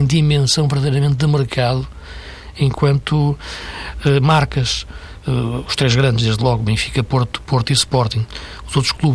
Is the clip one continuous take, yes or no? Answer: yes